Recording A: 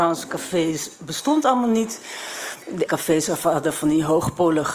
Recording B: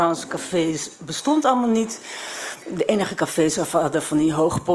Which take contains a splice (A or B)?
A